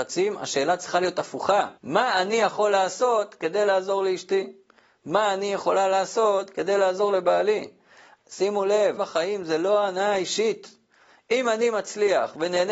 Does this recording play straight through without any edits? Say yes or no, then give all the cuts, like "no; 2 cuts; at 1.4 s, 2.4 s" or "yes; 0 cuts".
no; 2 cuts; at 1.8 s, 9.0 s